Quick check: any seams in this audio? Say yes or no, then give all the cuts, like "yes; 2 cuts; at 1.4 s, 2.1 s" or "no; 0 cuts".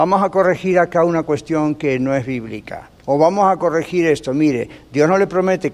yes; 1 cut; at 3.0 s